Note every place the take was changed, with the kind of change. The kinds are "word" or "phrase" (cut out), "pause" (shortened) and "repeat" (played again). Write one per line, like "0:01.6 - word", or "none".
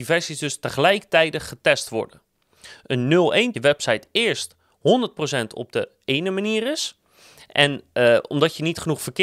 0:03.5 - phrase